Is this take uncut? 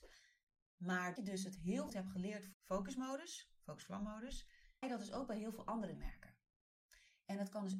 no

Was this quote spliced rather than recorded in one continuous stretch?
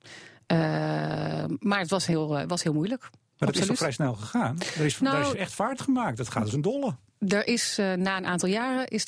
no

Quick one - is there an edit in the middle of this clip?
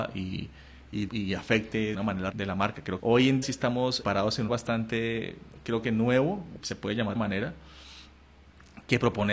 yes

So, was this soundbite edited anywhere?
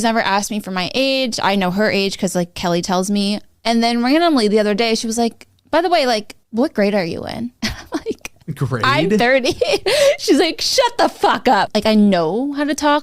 yes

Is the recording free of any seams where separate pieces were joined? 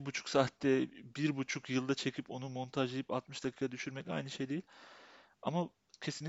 yes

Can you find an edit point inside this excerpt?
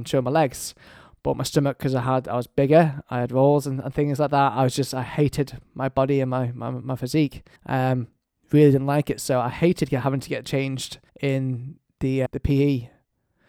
yes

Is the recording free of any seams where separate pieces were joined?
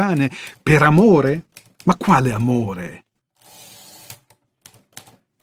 yes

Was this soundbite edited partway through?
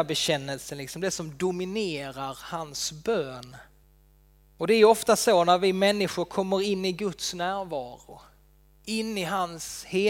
yes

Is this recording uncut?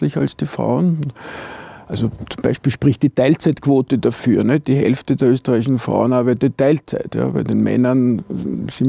yes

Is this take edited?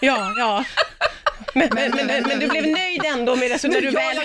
yes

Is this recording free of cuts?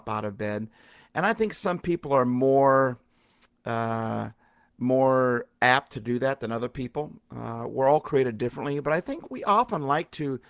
yes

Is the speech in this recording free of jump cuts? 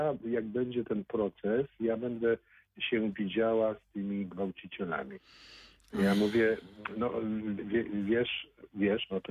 no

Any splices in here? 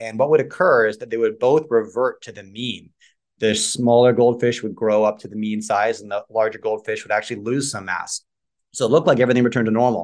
no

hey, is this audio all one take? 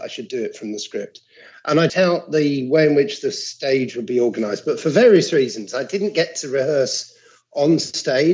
no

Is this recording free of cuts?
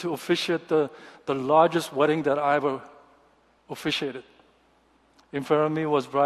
yes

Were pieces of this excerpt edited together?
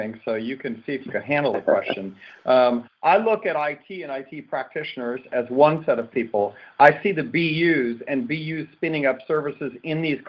no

